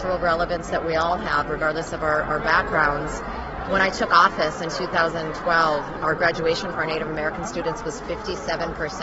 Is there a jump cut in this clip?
yes; 1 cut; at 6.7 s

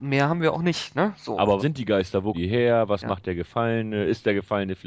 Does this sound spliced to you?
yes; 2 cuts; at 1.6 s, 2.3 s

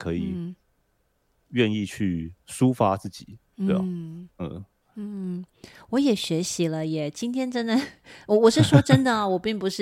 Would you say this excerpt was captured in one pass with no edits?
no; 2 cuts; at 2.4 s, 4.3 s

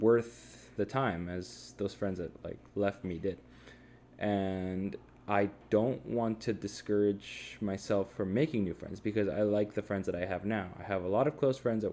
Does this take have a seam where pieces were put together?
no; 0 cuts

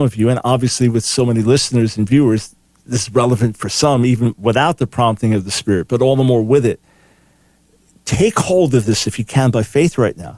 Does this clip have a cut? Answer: no; 0 cuts

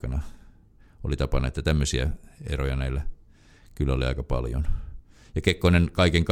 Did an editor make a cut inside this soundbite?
no; 0 cuts

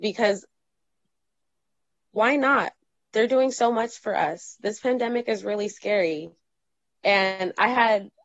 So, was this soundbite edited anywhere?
no; 0 cuts

